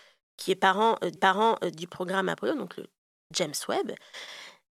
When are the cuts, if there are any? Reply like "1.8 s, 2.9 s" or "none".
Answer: 1.2 s